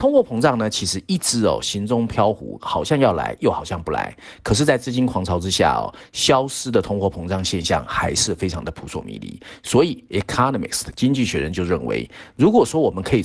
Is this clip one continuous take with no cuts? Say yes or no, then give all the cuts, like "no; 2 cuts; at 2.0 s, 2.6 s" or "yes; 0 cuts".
yes; 0 cuts